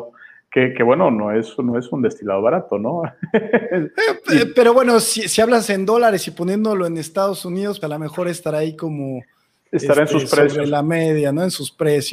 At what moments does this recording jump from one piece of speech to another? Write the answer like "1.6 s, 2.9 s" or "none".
7.8 s